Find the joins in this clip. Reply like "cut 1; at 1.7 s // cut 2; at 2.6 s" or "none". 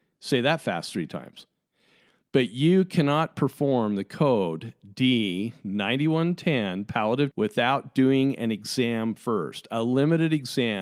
cut 1; at 7.3 s